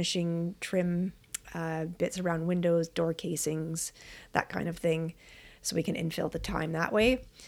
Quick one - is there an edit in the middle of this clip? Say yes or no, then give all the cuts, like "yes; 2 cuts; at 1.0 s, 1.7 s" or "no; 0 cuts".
no; 0 cuts